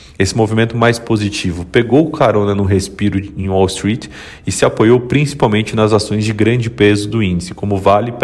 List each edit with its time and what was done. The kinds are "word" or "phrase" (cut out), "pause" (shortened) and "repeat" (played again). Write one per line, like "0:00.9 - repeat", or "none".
none